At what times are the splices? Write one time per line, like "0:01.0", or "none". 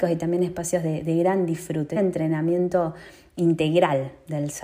0:02.0